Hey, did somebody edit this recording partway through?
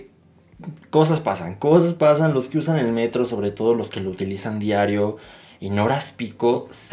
no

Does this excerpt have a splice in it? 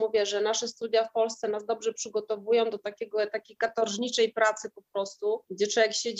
no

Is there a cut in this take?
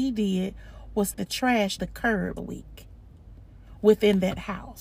yes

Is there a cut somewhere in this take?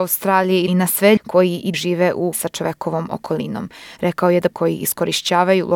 yes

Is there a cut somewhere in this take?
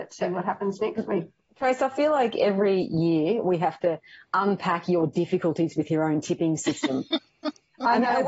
no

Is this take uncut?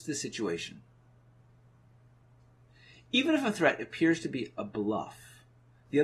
yes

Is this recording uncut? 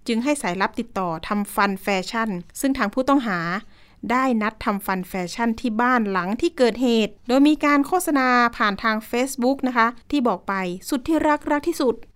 no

